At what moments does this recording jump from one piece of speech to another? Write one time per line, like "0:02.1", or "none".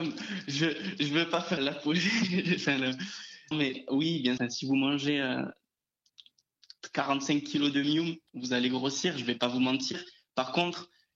0:01.6
0:03.5
0:04.4
0:08.3